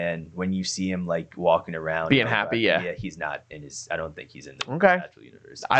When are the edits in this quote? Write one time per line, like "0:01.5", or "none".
none